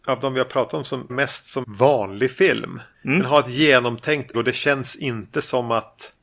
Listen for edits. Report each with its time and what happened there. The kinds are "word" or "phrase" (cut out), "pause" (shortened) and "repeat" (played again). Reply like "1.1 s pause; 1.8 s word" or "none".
1.1 s word; 1.6 s word; 4.3 s word